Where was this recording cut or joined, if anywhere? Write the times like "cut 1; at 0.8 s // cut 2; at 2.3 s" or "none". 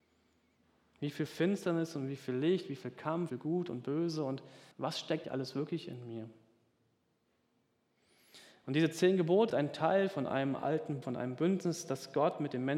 cut 1; at 3.3 s // cut 2; at 4.7 s // cut 3; at 5.2 s // cut 4; at 9.5 s // cut 5; at 11.0 s